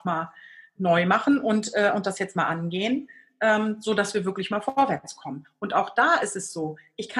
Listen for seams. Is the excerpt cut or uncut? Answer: uncut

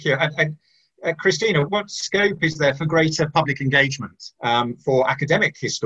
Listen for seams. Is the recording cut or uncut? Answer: cut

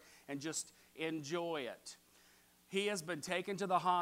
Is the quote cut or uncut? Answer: uncut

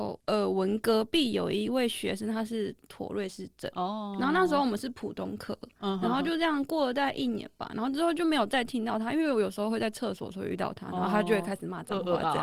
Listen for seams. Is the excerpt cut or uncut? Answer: uncut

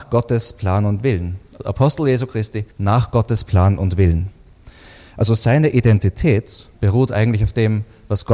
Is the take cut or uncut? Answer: cut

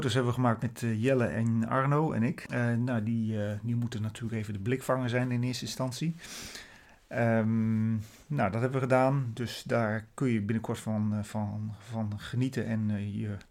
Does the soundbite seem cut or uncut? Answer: uncut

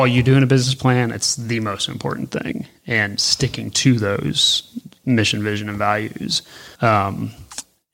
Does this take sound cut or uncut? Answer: cut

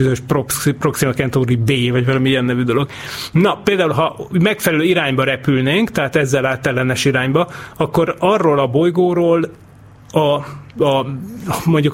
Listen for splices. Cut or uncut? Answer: uncut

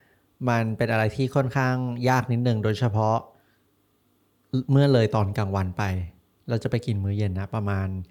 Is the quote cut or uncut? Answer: uncut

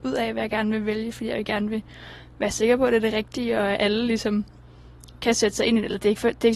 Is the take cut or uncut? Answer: uncut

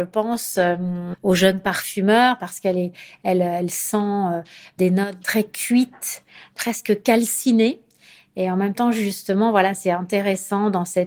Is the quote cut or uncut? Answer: uncut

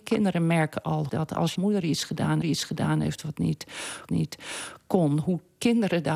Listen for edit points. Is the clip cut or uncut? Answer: cut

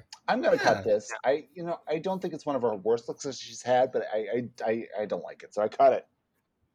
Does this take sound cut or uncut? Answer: uncut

